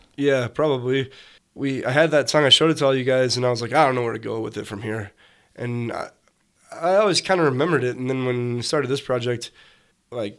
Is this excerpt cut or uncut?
uncut